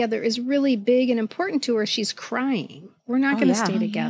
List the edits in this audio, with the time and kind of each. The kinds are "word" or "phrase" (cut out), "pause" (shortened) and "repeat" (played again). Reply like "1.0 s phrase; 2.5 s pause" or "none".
1.9 s word; 3.0 s pause